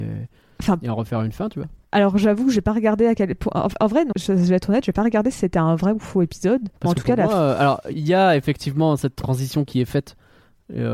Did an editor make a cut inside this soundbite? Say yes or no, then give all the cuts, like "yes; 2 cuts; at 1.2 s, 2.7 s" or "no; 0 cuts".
yes; 4 cuts; at 1.8 s, 4.1 s, 6.8 s, 7.9 s